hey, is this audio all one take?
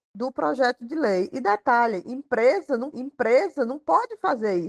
no; 1 cut; at 2.9 s

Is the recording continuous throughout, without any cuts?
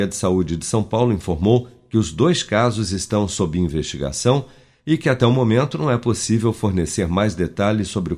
yes; 0 cuts

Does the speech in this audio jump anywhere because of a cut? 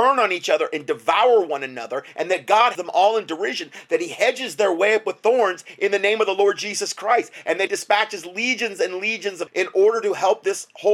yes; 3 cuts; at 2.7 s, 7.7 s, 9.5 s

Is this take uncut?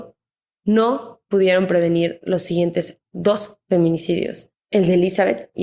yes; 0 cuts

